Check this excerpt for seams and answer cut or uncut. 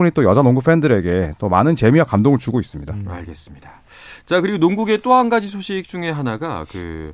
uncut